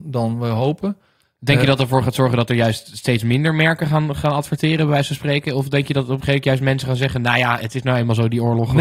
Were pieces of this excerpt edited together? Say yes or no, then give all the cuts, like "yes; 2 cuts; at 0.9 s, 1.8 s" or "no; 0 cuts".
no; 0 cuts